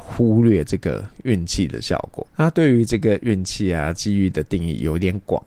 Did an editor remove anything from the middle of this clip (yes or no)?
yes